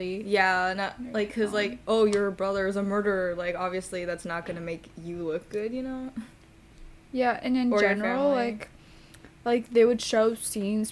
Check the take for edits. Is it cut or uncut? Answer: uncut